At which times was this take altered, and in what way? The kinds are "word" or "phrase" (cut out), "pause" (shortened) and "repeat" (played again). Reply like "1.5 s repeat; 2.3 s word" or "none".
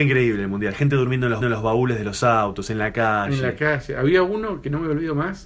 1.4 s repeat

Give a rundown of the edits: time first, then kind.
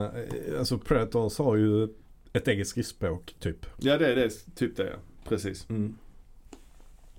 none

